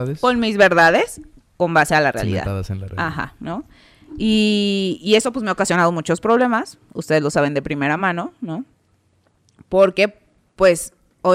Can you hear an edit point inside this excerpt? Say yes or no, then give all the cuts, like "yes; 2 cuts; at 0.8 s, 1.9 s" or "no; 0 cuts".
no; 0 cuts